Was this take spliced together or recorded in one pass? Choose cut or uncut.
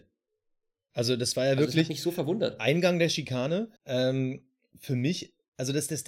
cut